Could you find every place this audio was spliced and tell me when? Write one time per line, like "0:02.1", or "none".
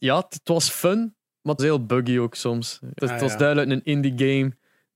0:01.6
0:03.0

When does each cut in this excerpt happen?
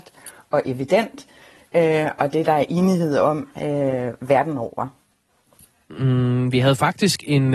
none

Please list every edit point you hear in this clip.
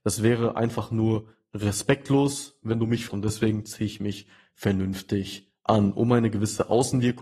0:03.1

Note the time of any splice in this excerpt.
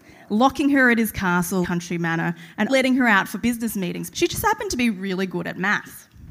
0:01.6
0:02.7
0:03.4
0:04.1

